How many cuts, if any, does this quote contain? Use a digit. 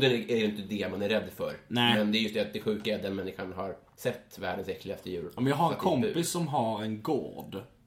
0